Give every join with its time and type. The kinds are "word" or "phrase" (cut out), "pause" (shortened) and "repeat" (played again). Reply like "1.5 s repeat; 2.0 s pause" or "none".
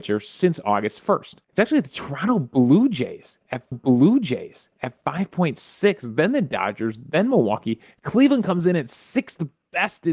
1.4 s pause; 3.7 s repeat